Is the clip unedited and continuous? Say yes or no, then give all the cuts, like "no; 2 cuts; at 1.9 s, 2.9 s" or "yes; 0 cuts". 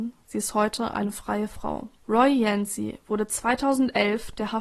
no; 1 cut; at 2.0 s